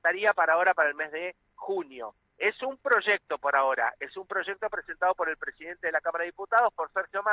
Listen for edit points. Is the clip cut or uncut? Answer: uncut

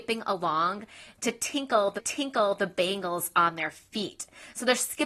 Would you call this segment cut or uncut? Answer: cut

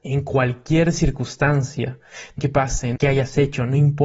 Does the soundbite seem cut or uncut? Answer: cut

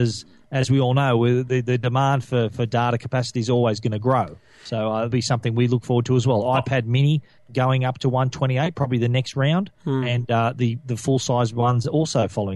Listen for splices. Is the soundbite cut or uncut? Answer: cut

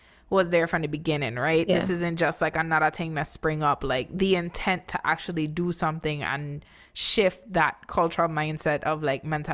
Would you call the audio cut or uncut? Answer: uncut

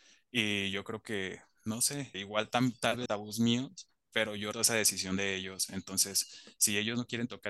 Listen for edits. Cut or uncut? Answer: cut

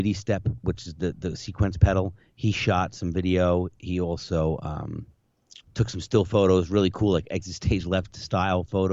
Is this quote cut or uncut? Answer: cut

